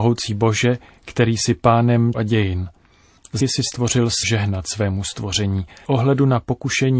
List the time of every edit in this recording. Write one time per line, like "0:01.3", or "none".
0:02.1
0:03.4
0:04.2
0:05.9